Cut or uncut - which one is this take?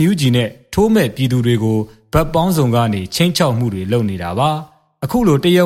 uncut